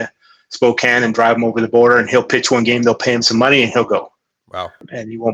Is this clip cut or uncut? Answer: uncut